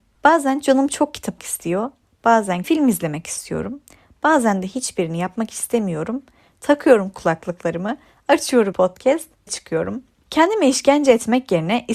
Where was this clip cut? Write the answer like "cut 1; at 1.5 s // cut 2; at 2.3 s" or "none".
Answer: cut 1; at 1.4 s // cut 2; at 2.6 s // cut 3; at 8.7 s // cut 4; at 9.5 s